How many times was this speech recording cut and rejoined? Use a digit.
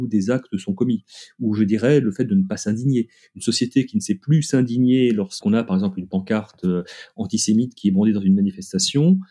0